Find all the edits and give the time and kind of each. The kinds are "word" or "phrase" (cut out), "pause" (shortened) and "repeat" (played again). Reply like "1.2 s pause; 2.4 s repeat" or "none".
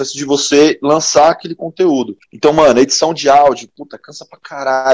2.2 s pause